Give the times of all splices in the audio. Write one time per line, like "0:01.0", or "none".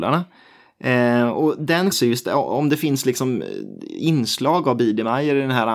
0:01.9